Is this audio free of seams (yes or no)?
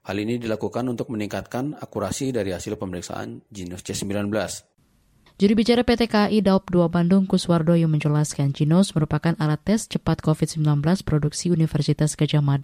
yes